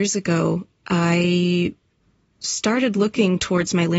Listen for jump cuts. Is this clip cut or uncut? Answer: uncut